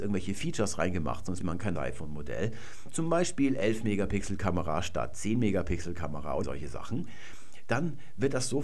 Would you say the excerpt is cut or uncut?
cut